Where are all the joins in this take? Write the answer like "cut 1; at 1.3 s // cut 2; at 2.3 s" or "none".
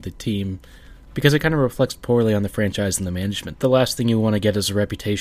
cut 1; at 1.0 s // cut 2; at 3.5 s

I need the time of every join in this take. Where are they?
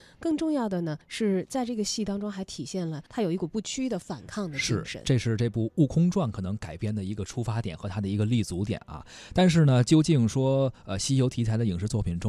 cut 1; at 1.0 s // cut 2; at 3.1 s

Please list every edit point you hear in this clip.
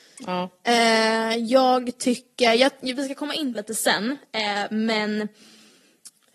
cut 1; at 3.5 s

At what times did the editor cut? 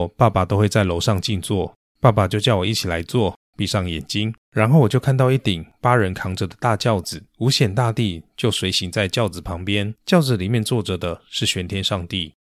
cut 1; at 4.4 s // cut 2; at 7.3 s // cut 3; at 10.0 s

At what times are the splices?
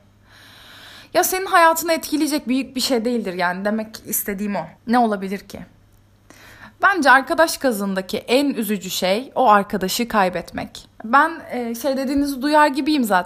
cut 1; at 4.8 s // cut 2; at 10.9 s

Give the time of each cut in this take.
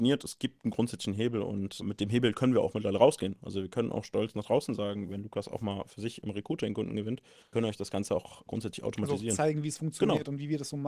cut 1; at 1.8 s // cut 2; at 7.5 s // cut 3; at 8.5 s

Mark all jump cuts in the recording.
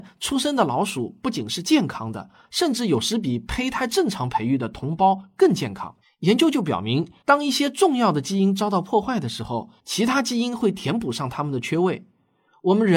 cut 1; at 6.0 s // cut 2; at 7.2 s // cut 3; at 9.8 s

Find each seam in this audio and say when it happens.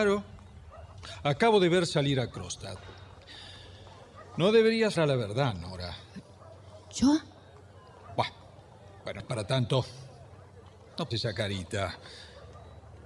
cut 1; at 5.0 s // cut 2; at 9.2 s // cut 3; at 11.1 s

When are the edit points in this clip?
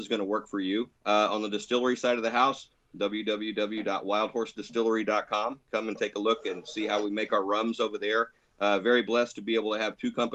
cut 1; at 1.0 s

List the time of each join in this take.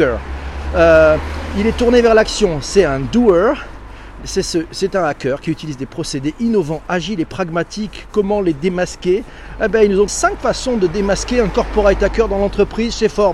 cut 1; at 10.1 s

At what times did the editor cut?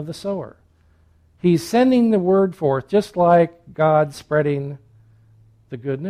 none

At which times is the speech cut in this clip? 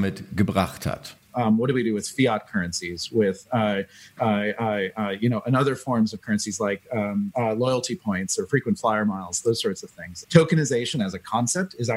cut 1; at 10.2 s

